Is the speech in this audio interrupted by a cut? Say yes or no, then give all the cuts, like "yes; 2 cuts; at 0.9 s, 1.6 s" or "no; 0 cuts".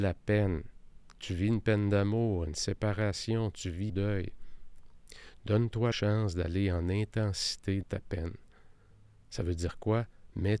yes; 3 cuts; at 3.9 s, 5.9 s, 7.8 s